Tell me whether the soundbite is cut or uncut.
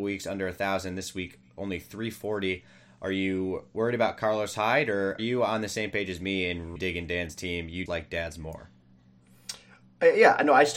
cut